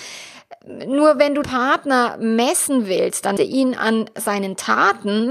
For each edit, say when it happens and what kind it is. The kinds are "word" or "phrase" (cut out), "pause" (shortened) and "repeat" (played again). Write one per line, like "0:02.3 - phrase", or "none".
0:01.4 - word
0:03.4 - word

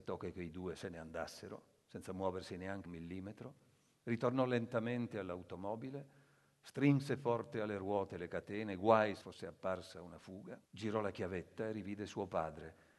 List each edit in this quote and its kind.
0:02.8 - phrase
0:09.2 - phrase
0:10.6 - pause

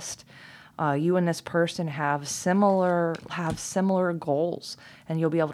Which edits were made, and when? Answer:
0:03.3 - word

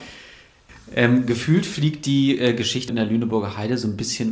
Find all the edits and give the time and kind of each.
0:02.9 - phrase

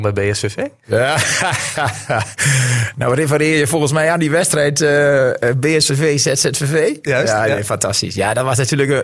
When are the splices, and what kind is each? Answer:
none

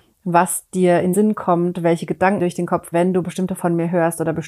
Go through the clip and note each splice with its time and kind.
0:01.1 - word
0:02.4 - word
0:02.9 - word
0:03.6 - word

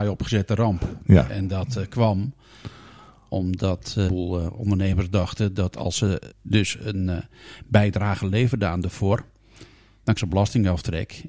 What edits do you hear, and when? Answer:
0:04.1 - word
0:06.3 - pause
0:10.2 - word

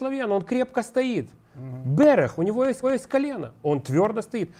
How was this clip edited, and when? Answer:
0:02.8 - repeat

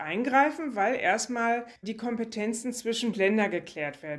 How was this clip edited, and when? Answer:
0:01.8 - pause
0:03.1 - phrase

